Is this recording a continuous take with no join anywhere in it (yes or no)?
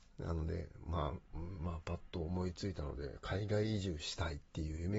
yes